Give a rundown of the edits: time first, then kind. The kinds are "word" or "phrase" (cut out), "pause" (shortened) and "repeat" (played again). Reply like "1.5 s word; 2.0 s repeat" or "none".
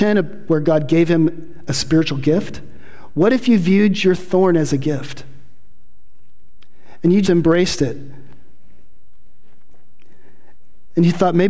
7.2 s word